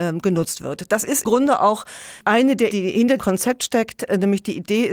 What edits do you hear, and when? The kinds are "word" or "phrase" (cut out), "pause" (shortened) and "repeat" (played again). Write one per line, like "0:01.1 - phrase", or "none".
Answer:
0:01.3 - word
0:02.2 - word
0:02.7 - word
0:03.2 - word